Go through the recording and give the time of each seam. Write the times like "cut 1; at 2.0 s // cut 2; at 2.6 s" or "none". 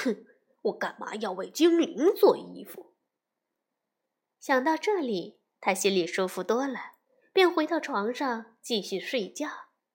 none